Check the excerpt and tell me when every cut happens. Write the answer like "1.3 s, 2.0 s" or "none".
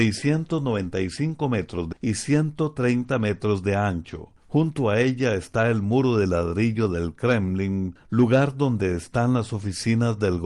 1.9 s